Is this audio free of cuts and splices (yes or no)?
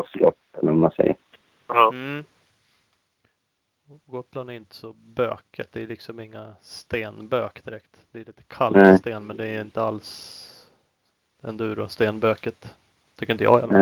yes